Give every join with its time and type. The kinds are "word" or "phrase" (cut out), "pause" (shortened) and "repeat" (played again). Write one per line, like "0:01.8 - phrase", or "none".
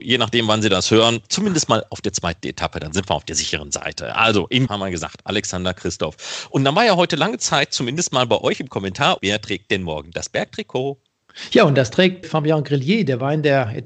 0:04.7 - word
0:09.2 - word
0:12.2 - word